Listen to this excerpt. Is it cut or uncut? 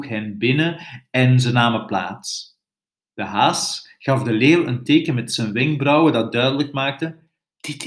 uncut